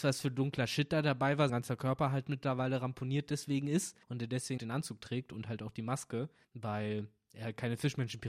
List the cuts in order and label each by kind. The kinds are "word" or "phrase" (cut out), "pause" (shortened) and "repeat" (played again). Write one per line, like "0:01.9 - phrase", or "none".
0:01.5 - word
0:04.0 - pause
0:04.6 - word
0:06.4 - pause